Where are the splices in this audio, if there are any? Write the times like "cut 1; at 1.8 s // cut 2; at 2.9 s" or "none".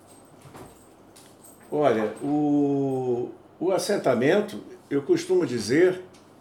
none